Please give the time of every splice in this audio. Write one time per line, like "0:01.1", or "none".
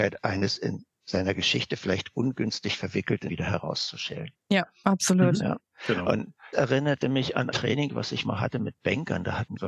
0:03.3
0:06.5
0:07.5